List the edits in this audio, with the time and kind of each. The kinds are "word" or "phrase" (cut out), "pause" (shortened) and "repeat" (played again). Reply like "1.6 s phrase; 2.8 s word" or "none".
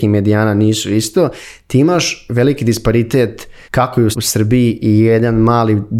3.6 s pause; 4.1 s word